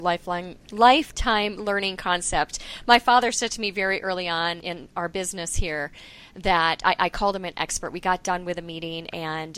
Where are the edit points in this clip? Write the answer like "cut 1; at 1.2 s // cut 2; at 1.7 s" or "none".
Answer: none